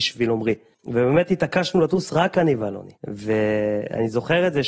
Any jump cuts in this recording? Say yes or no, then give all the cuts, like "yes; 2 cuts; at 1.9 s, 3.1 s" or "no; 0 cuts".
yes; 1 cut; at 2.9 s